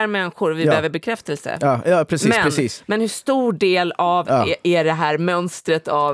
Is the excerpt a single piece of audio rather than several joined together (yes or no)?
yes